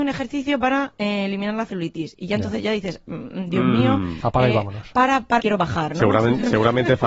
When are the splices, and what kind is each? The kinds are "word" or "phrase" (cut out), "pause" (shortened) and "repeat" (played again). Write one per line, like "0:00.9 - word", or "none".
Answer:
0:05.4 - phrase

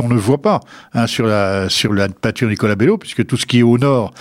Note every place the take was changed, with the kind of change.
none

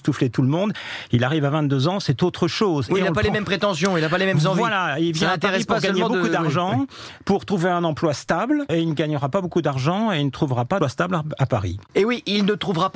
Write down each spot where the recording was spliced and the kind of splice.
0:10.8 - word

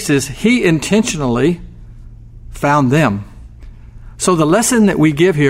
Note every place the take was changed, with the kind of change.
none

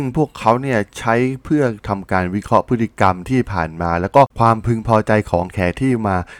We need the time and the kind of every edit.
0:04.3 - pause

